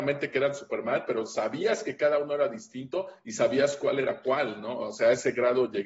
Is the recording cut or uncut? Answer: uncut